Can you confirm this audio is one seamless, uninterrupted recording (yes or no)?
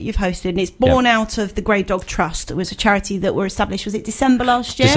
yes